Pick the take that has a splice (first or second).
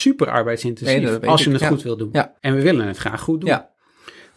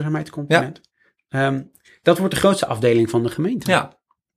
first